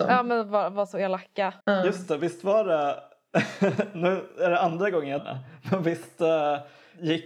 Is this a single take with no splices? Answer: no; 2 cuts; at 1.6 s, 5.2 s

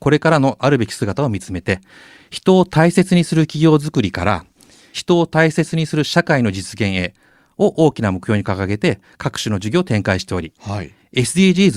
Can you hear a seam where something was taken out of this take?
no; 0 cuts

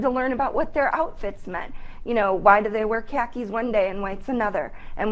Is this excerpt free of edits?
yes; 0 cuts

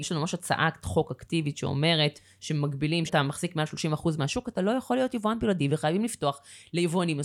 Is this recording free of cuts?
no; 1 cut; at 3.1 s

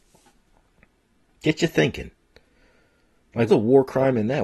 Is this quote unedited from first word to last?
no; 1 cut; at 3.5 s

